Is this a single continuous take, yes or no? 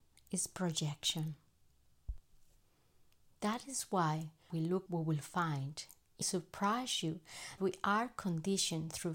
no